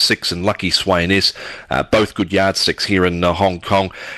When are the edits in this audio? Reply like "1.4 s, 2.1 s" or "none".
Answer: none

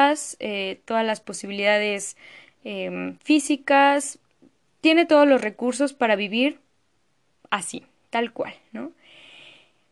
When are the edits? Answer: none

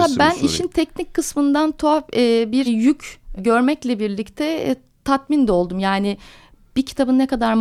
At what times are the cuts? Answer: 2.7 s, 3.4 s

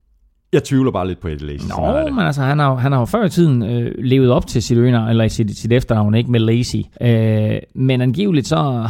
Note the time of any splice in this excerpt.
6.9 s

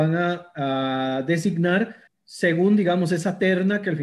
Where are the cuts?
2.1 s

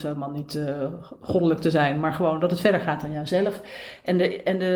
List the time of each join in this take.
none

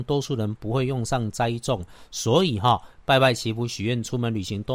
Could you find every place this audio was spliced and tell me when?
none

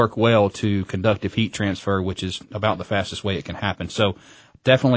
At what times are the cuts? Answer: none

